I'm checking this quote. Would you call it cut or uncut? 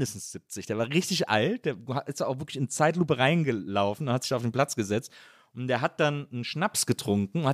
uncut